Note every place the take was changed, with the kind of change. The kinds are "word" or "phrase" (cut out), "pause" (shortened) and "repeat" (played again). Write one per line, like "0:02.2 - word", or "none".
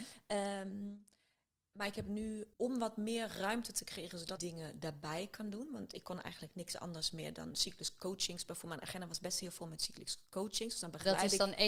0:02.5 - word
0:04.4 - phrase